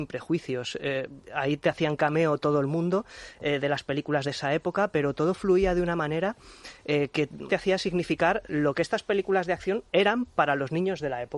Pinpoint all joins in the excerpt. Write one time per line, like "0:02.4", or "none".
0:04.2
0:07.5
0:09.9